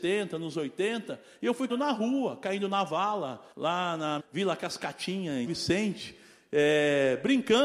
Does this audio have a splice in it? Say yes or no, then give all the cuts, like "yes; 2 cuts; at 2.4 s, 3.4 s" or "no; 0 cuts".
yes; 4 cuts; at 1.7 s, 3.5 s, 4.2 s, 5.5 s